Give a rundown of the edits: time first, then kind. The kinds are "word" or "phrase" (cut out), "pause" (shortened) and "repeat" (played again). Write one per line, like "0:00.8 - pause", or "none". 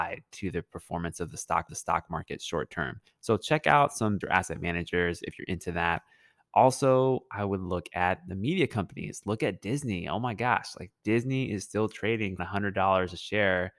0:01.7 - repeat
0:04.2 - word
0:12.4 - phrase